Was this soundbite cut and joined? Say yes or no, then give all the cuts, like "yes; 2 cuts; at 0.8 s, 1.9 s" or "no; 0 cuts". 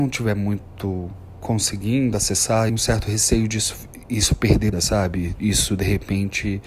yes; 3 cuts; at 2.7 s, 4.1 s, 4.7 s